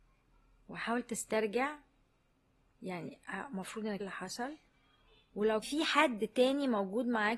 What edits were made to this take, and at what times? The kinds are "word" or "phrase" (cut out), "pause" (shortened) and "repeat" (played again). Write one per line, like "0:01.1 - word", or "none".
0:04.0 - phrase
0:05.6 - word